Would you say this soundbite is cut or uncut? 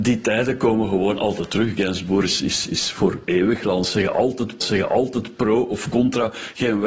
cut